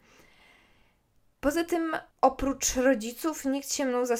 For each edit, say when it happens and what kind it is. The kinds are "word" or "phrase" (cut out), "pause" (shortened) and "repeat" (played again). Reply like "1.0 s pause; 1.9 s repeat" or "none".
2.1 s pause